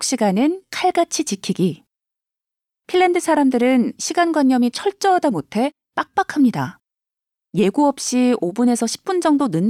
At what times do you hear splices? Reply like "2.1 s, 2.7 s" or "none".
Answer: none